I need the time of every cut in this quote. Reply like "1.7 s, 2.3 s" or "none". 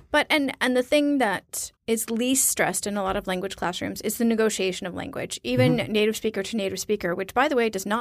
1.8 s